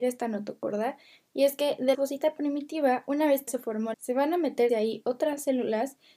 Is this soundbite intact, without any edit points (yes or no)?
no